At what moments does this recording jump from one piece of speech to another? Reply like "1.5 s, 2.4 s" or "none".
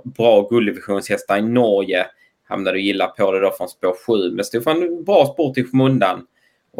none